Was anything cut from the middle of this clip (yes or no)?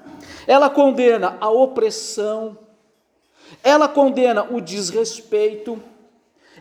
no